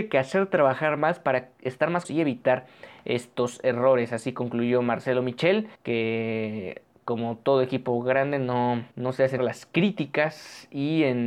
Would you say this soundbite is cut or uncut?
cut